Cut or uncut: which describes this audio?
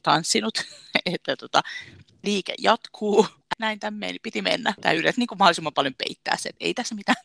uncut